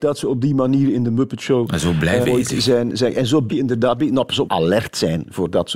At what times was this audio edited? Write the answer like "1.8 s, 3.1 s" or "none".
2.2 s, 3.5 s, 4.5 s